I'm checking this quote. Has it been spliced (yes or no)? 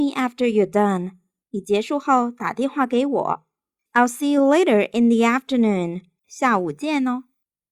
no